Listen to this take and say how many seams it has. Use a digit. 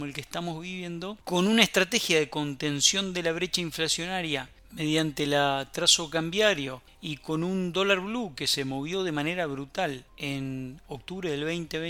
2